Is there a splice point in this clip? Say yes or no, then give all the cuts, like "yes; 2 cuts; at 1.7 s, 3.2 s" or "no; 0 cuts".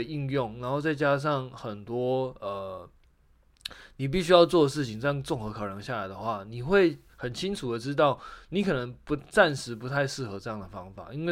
no; 0 cuts